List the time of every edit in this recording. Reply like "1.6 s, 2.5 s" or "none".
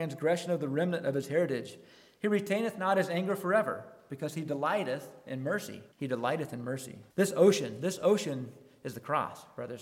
5.9 s, 7.1 s